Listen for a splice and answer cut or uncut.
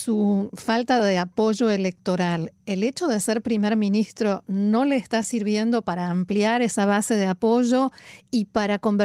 uncut